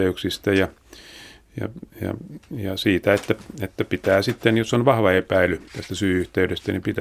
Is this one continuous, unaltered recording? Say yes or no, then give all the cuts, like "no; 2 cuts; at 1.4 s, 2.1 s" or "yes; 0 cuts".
no; 2 cuts; at 1.9 s, 5.7 s